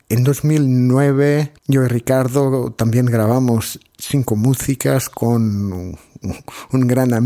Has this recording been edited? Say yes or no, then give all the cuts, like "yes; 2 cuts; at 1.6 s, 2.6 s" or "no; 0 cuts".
yes; 1 cut; at 1.6 s